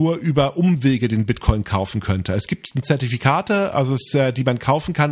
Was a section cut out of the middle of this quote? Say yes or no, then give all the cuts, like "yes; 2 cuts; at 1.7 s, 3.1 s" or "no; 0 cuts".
yes; 1 cut; at 2.8 s